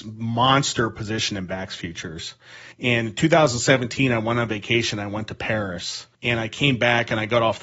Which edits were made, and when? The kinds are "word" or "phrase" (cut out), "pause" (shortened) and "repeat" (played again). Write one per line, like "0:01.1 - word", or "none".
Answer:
0:02.7 - pause
0:06.1 - pause